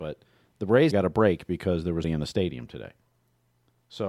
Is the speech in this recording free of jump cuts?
no; 2 cuts; at 0.9 s, 2.0 s

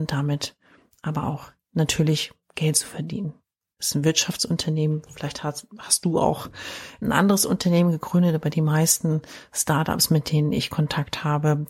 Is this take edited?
yes; 1 cut; at 7.0 s

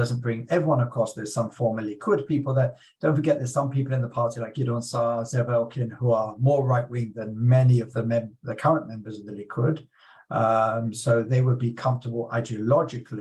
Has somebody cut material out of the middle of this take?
no; 0 cuts

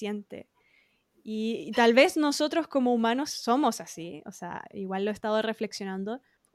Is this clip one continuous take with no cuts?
yes; 0 cuts

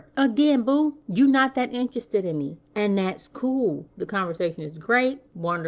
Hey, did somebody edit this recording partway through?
no; 0 cuts

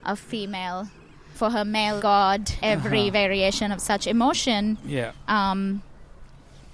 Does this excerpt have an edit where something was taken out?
yes; 3 cuts; at 1.3 s, 2.0 s, 2.6 s

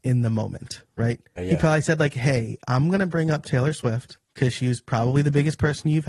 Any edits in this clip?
yes; 2 cuts; at 1.4 s, 4.2 s

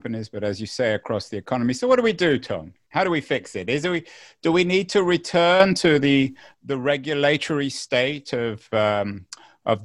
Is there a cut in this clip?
no; 0 cuts

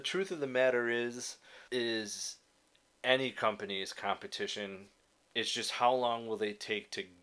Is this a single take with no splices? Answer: no; 2 cuts; at 1.7 s, 5.1 s

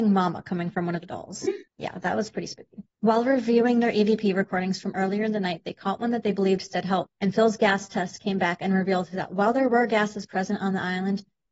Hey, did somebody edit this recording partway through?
yes; 3 cuts; at 1.7 s, 2.9 s, 7.1 s

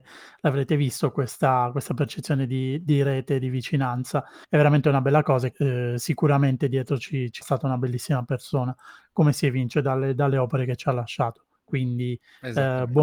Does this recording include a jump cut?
yes; 4 cuts; at 4.4 s, 5.5 s, 7.4 s, 11.6 s

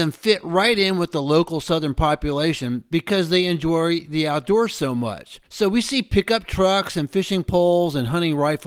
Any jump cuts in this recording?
yes; 1 cut; at 5.5 s

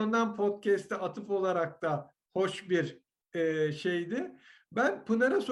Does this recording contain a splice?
no; 0 cuts

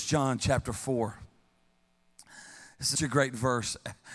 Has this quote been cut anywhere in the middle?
yes; 1 cut; at 2.9 s

